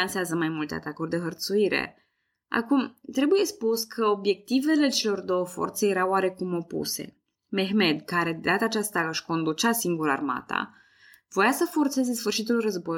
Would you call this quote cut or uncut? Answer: uncut